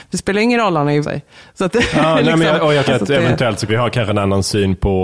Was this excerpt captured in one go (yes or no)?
no